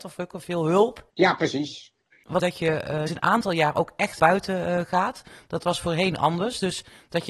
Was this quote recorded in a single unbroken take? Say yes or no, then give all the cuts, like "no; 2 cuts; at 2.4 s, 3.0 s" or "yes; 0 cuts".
no; 4 cuts; at 1.1 s, 2.4 s, 3.1 s, 4.2 s